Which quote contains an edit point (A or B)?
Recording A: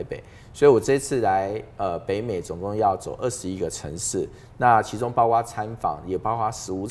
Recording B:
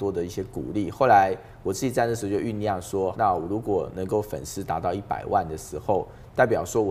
B